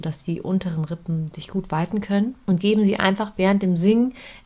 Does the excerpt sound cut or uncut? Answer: uncut